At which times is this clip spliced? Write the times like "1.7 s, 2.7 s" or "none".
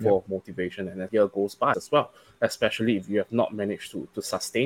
1.1 s, 1.7 s

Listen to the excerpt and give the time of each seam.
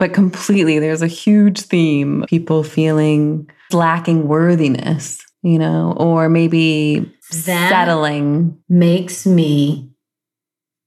2.2 s, 3.7 s, 5.3 s, 7.2 s, 8.6 s

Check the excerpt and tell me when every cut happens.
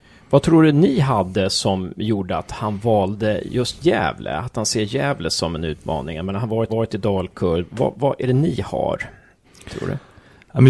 6.7 s

